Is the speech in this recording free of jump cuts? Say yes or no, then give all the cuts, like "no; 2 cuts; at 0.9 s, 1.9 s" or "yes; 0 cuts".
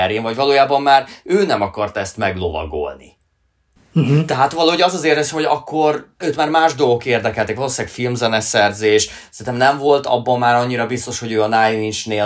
no; 1 cut; at 6.2 s